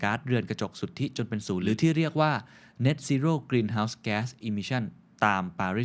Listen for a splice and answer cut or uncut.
uncut